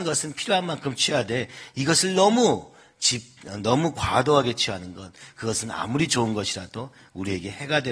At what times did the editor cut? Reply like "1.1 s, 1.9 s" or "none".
none